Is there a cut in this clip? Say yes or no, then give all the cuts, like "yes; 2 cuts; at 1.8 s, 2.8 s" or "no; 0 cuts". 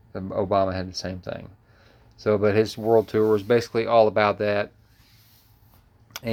no; 0 cuts